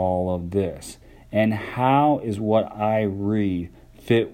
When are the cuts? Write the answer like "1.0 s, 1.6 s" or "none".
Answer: none